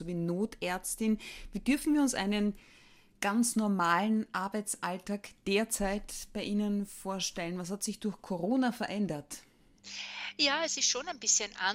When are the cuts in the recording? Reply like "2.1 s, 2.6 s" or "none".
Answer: none

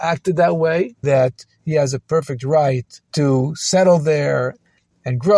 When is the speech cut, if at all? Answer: 1.0 s, 3.0 s

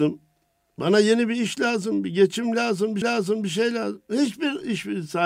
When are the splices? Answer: 3.0 s

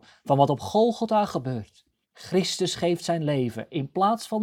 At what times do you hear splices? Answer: 2.0 s

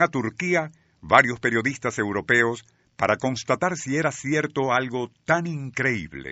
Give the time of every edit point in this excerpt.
none

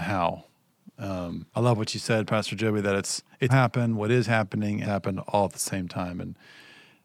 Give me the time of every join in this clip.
1.5 s, 3.5 s, 4.8 s

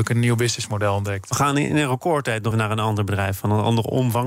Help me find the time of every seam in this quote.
2.5 s

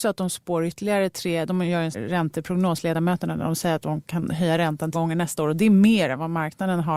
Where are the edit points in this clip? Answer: 1.9 s, 4.9 s

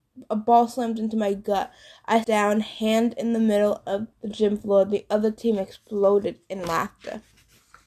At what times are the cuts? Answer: 2.2 s, 4.1 s

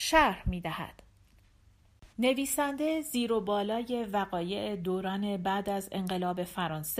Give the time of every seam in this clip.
2.1 s

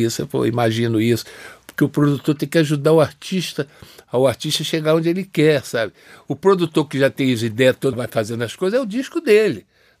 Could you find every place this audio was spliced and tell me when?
7.9 s

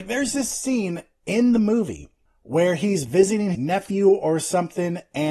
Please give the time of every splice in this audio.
3.5 s

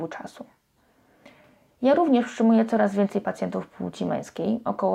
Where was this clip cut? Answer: none

